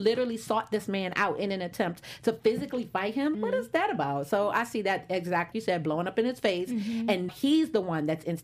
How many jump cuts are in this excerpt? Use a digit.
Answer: 3